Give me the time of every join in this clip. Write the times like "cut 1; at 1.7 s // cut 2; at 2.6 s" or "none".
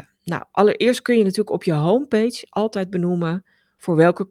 none